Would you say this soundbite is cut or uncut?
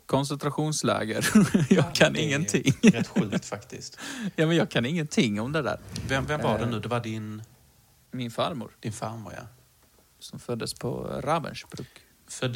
cut